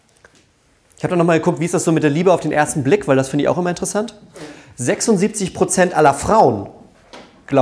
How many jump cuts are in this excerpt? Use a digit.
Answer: 0